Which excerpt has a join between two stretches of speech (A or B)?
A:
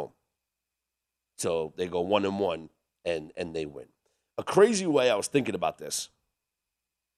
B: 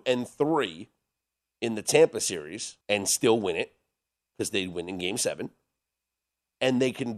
B